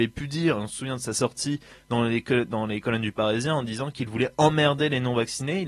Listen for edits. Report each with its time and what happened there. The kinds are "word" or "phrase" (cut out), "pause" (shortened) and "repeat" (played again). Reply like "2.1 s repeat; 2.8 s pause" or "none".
none